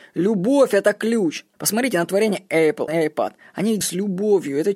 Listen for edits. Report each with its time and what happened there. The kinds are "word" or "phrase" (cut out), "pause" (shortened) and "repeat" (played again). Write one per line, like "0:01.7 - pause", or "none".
0:01.5 - pause
0:02.9 - word
0:03.8 - word